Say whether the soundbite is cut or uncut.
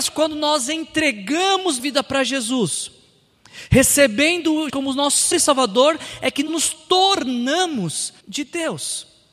cut